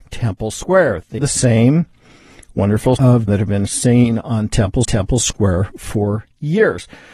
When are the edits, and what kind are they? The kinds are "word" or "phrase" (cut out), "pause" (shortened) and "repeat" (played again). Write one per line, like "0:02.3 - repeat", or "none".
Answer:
0:01.2 - word
0:03.0 - word
0:03.3 - phrase
0:04.8 - repeat